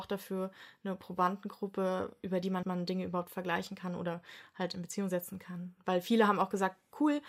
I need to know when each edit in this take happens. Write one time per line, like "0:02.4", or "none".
0:02.6